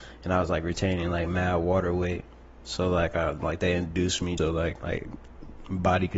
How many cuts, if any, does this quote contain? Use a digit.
2